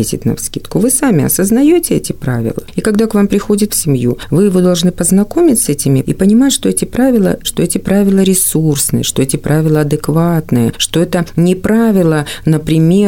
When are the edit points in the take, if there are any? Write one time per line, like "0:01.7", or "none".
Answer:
0:03.7
0:06.0
0:07.4